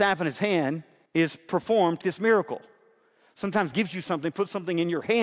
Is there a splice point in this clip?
yes; 3 cuts; at 1.1 s, 2.0 s, 3.7 s

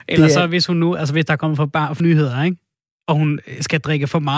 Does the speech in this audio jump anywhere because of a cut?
yes; 1 cut; at 2.0 s

